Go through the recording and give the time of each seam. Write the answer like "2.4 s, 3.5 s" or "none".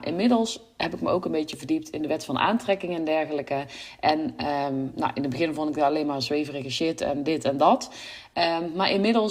none